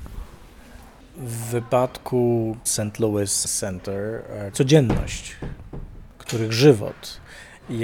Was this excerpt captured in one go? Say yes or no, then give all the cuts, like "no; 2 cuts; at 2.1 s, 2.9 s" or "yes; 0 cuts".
no; 3 cuts; at 2.7 s, 3.4 s, 4.5 s